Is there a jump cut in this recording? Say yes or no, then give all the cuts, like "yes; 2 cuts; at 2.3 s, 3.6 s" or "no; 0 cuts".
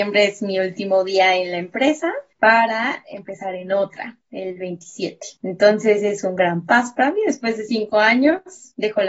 no; 0 cuts